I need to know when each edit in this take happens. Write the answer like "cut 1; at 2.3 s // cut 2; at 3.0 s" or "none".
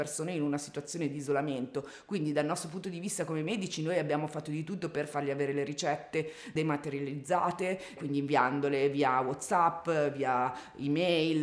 cut 1; at 8.0 s